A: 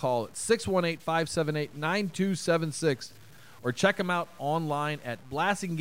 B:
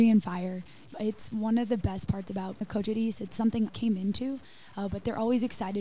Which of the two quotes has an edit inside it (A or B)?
B